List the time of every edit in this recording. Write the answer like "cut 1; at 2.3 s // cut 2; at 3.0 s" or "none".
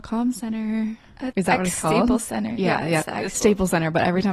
cut 1; at 1.3 s // cut 2; at 3.3 s